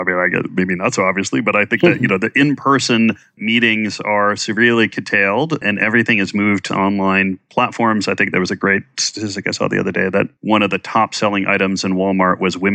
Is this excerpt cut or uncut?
cut